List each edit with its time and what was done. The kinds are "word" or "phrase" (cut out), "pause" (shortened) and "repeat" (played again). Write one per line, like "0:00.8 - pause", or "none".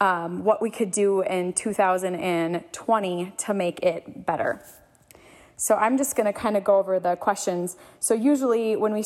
none